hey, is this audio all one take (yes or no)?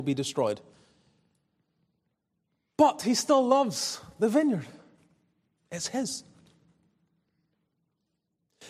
yes